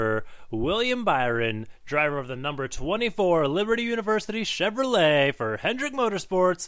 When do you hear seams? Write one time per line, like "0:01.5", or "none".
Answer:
none